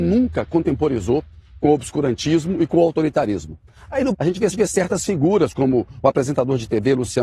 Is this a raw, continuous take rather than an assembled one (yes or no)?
no